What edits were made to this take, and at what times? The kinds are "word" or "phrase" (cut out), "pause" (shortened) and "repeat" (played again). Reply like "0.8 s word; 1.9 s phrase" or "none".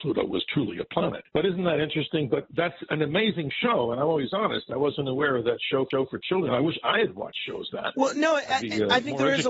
1.3 s pause; 5.9 s repeat; 7.7 s word